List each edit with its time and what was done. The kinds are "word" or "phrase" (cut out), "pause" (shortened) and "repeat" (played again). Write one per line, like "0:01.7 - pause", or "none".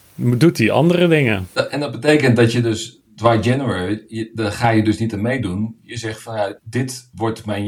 0:06.6 - pause